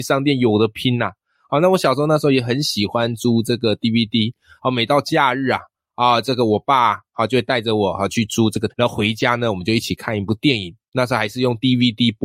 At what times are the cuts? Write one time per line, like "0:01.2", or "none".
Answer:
0:08.7